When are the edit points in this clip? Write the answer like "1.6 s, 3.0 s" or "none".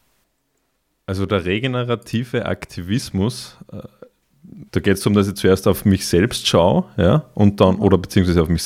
4.7 s